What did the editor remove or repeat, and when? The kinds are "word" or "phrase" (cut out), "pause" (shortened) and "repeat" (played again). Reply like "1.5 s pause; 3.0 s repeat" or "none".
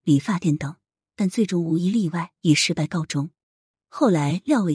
none